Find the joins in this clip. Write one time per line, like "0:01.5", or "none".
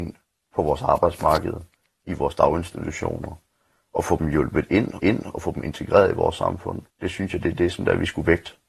0:05.0
0:06.9